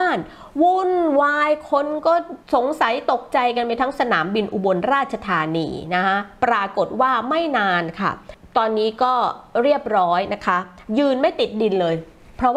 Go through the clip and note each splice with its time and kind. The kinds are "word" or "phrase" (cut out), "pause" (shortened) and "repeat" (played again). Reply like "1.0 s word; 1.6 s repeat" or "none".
2.4 s pause